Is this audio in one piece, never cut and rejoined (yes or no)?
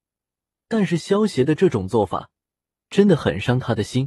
yes